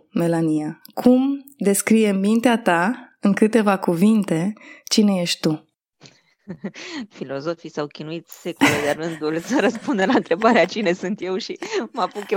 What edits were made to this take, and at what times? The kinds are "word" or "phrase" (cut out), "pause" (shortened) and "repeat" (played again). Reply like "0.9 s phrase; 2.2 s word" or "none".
none